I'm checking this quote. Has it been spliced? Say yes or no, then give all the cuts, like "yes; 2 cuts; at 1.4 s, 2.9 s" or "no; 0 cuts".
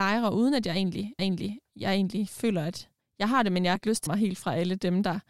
yes; 4 cuts; at 1.2 s, 3.0 s, 3.8 s, 4.1 s